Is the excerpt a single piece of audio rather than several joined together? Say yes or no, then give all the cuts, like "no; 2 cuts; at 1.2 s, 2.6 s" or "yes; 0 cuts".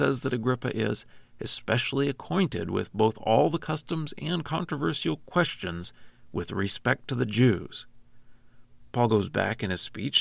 yes; 0 cuts